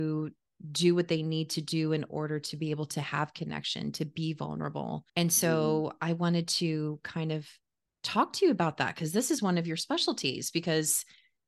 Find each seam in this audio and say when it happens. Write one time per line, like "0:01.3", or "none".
0:05.1